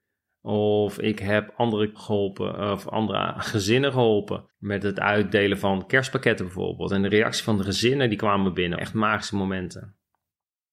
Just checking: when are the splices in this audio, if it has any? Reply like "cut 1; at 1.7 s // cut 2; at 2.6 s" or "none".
cut 1; at 1.9 s // cut 2; at 4.5 s // cut 3; at 8.8 s